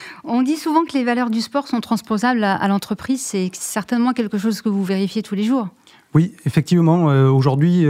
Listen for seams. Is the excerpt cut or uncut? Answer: uncut